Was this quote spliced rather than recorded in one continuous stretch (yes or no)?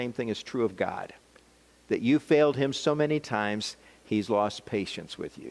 no